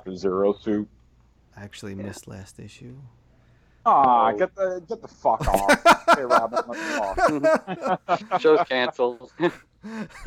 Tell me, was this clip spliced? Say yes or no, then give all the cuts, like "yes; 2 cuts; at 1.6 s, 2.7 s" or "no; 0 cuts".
no; 0 cuts